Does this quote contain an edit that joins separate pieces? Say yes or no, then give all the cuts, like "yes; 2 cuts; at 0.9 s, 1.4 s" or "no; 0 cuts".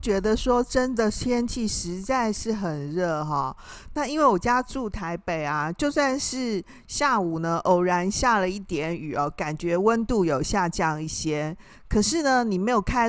no; 0 cuts